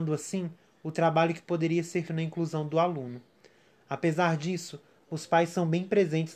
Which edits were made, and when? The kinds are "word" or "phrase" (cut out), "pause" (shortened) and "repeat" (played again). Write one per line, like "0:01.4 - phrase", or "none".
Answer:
0:02.1 - word